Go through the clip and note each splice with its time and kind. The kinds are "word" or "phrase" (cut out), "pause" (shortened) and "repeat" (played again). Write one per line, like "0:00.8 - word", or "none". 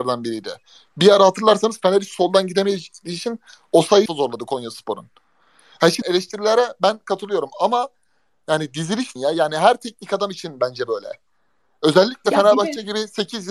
0:04.1 - phrase
0:06.0 - phrase
0:09.2 - phrase